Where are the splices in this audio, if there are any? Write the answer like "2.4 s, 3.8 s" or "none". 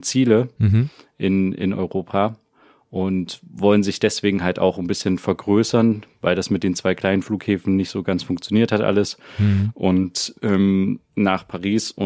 none